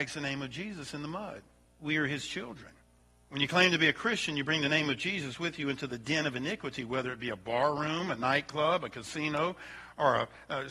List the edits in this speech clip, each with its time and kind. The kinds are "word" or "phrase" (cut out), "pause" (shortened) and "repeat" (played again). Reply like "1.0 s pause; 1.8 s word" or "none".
1.6 s pause; 3.0 s pause